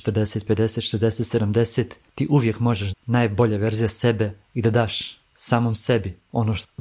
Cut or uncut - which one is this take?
cut